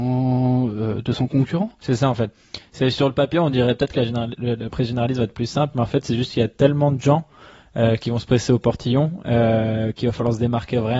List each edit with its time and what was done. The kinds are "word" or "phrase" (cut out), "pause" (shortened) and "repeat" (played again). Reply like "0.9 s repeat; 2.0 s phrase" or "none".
none

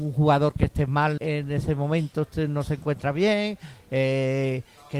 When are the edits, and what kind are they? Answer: 1.2 s word

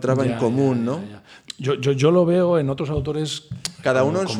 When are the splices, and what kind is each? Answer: none

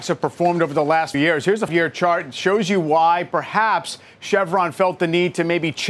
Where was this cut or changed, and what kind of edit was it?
1.1 s word; 1.7 s word

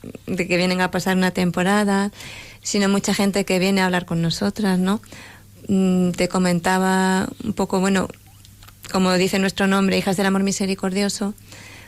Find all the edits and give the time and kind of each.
none

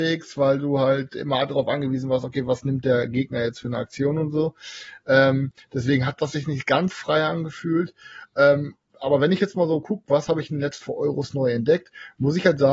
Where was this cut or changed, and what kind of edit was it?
6.9 s word; 10.8 s word

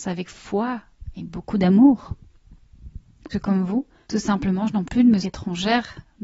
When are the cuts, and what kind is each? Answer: 3.3 s word; 4.8 s word; 5.2 s word

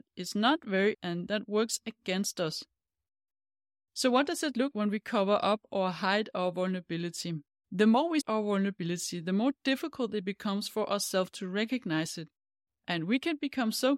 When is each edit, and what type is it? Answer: 0.9 s word; 4.7 s word; 7.5 s pause; 8.2 s word

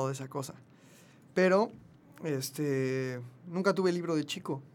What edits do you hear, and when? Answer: none

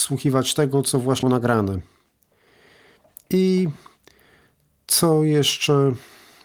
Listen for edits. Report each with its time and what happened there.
1.2 s word

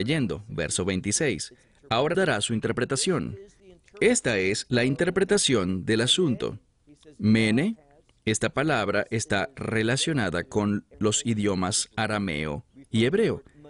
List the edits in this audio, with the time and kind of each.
2.1 s word; 10.9 s pause

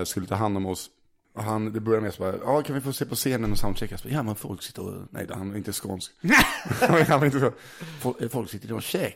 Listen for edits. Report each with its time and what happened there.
none

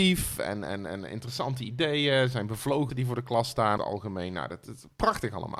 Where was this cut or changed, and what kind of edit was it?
2.9 s word; 3.8 s word

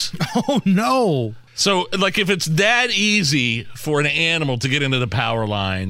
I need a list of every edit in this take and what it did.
1.5 s pause

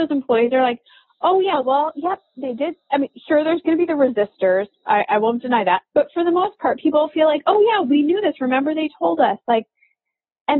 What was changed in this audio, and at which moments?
5.9 s pause

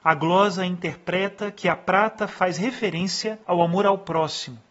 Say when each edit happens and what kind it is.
3.4 s pause

